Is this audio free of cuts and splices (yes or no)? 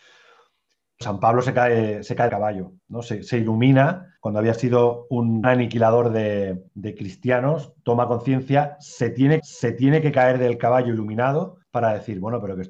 no